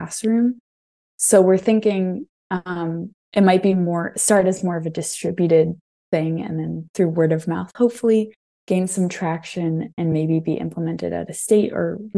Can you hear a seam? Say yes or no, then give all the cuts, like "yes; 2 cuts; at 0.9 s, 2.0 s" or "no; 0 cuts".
no; 0 cuts